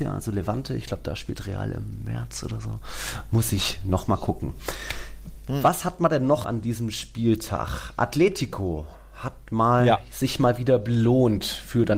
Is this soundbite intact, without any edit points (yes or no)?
no